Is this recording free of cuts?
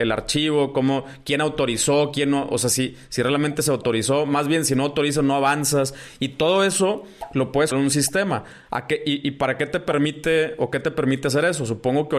no; 1 cut; at 7.7 s

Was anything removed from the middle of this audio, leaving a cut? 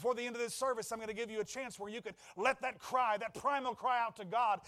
no; 0 cuts

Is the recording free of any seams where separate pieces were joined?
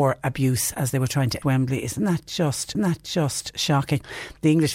no; 2 cuts; at 1.4 s, 2.7 s

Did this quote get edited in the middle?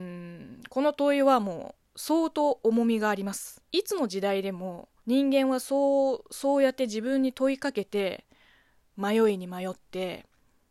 yes; 2 cuts; at 3.7 s, 5.0 s

